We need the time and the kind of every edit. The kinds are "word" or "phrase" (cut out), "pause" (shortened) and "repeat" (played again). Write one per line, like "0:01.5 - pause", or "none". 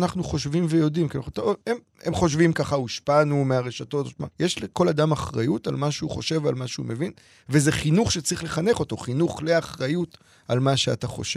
0:04.3 - pause